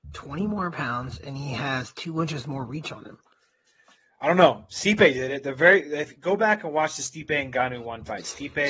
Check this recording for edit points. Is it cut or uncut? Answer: uncut